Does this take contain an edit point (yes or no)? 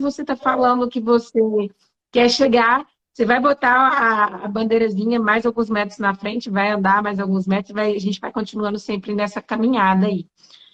no